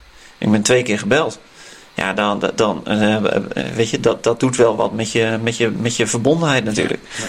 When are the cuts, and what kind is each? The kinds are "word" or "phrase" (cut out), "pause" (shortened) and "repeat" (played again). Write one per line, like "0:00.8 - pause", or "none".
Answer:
none

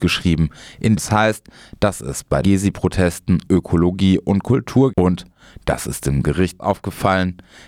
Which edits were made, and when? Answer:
0:01.0 - word
0:02.4 - word
0:03.5 - word
0:04.9 - word
0:06.6 - word

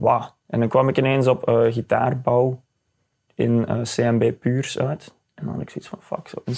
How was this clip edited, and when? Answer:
none

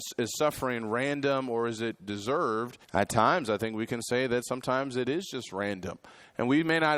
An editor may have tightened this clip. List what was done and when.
0:02.8 - pause

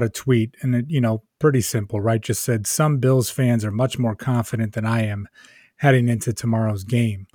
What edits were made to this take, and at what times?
none

